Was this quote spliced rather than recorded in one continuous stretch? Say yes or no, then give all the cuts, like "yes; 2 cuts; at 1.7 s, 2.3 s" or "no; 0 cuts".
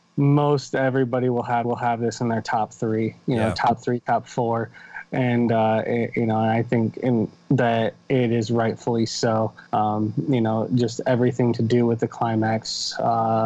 yes; 3 cuts; at 1.6 s, 7.3 s, 9.7 s